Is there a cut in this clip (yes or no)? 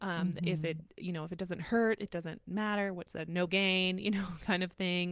yes